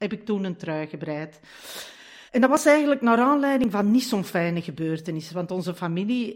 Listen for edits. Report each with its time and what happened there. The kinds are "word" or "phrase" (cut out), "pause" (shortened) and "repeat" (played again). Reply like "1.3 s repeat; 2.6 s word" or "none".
2.3 s pause